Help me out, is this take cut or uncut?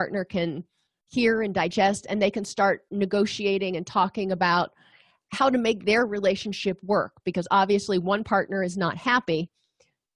uncut